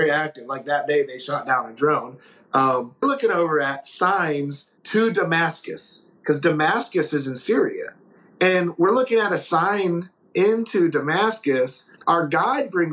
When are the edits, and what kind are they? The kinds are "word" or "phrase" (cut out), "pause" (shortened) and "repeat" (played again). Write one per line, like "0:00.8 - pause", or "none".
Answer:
0:03.0 - word
0:04.8 - pause
0:08.0 - pause